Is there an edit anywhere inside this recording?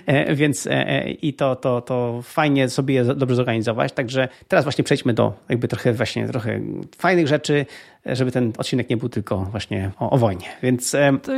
yes; 2 cuts; at 1.6 s, 9.9 s

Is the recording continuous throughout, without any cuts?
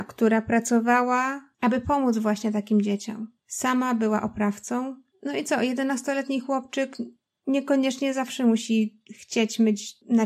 yes; 0 cuts

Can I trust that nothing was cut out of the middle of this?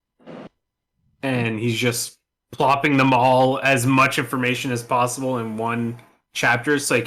yes; 0 cuts

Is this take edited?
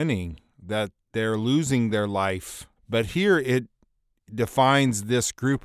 yes; 1 cut; at 2.8 s

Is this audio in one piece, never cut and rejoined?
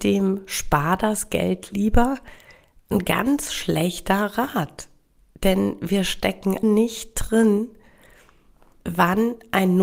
no; 1 cut; at 6.6 s

